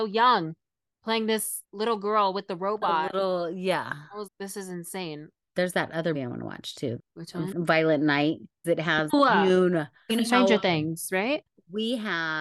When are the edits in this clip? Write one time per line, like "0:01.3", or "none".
0:01.6
0:04.3
0:05.4
0:06.1
0:07.0
0:07.5
0:08.6
0:09.1
0:10.1